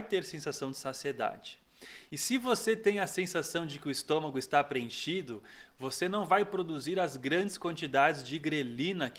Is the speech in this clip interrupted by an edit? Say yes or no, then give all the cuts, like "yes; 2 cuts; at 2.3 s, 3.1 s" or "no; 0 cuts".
no; 0 cuts